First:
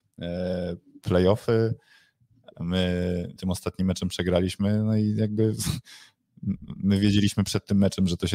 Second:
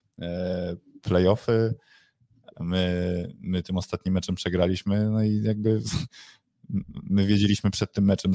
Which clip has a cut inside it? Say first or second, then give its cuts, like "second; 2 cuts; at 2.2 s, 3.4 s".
first; 1 cut; at 3.4 s